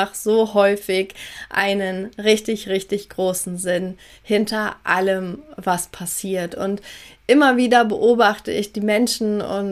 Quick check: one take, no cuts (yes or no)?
yes